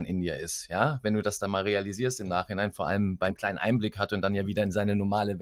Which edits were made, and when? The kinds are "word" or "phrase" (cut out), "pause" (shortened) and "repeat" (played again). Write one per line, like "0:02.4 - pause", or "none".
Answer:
0:03.3 - phrase